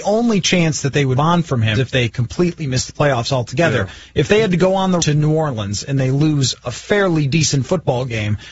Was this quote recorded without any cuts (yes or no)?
no